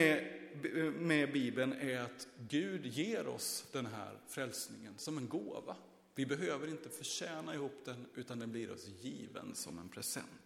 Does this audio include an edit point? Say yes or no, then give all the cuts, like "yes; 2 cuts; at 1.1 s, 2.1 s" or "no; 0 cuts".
no; 0 cuts